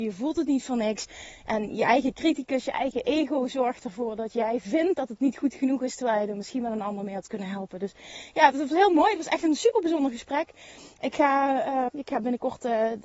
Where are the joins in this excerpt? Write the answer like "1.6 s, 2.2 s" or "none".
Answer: 8.5 s, 11.9 s